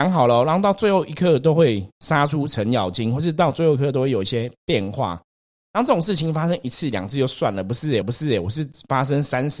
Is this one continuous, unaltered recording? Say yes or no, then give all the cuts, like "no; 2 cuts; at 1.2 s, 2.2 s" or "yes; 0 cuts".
no; 1 cut; at 8.0 s